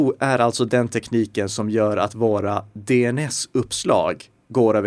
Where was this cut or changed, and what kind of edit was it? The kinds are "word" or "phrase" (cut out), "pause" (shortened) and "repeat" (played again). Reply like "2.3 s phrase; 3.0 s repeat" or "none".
none